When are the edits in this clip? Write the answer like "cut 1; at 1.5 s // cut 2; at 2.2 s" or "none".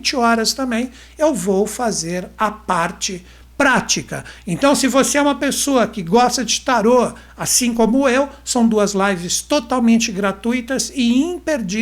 none